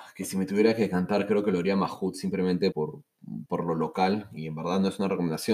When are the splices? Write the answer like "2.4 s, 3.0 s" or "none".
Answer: 2.7 s, 3.5 s

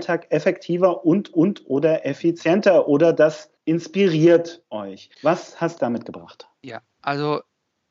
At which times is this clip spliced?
1.3 s, 3.6 s, 5.1 s, 5.8 s

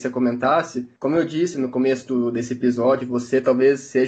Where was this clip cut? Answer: none

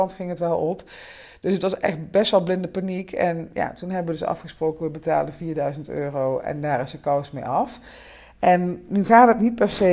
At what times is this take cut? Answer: none

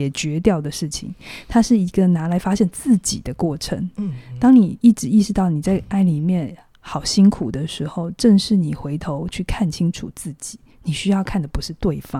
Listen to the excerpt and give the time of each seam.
10.7 s

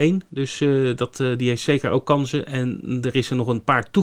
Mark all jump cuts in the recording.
none

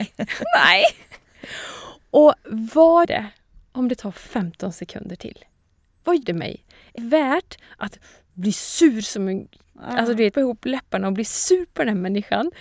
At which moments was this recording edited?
3.0 s, 6.2 s, 7.0 s, 10.3 s

